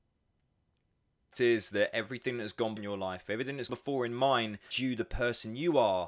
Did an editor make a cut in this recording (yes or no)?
yes